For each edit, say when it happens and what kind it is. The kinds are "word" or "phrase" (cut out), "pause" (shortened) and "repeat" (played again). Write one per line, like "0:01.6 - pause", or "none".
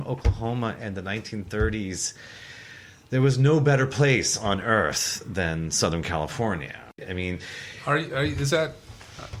0:06.9 - pause